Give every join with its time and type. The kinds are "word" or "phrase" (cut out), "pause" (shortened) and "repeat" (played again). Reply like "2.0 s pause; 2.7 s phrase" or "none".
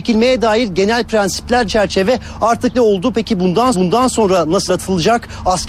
1.7 s word; 2.7 s word; 3.7 s repeat; 4.7 s word